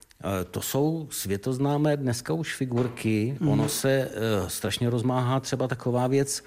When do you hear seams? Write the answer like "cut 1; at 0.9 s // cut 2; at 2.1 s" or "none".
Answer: none